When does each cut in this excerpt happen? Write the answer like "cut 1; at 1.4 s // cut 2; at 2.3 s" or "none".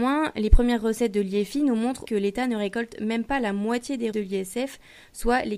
cut 1; at 2.1 s // cut 2; at 4.1 s